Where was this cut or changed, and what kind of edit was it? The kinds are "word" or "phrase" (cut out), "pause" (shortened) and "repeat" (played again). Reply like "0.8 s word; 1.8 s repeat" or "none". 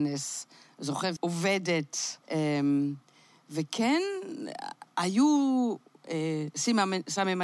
1.2 s phrase; 2.2 s pause